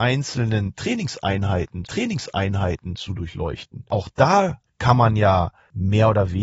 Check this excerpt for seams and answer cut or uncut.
cut